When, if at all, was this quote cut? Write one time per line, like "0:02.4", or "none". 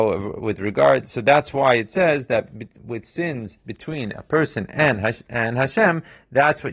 none